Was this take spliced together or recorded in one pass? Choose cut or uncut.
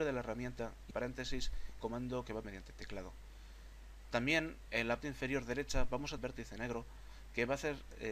cut